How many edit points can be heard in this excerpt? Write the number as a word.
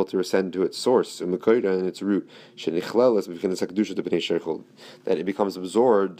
zero